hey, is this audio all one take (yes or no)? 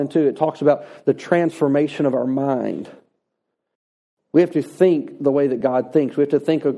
yes